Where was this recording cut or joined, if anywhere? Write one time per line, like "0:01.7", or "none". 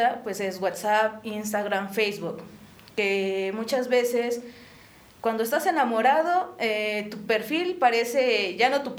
none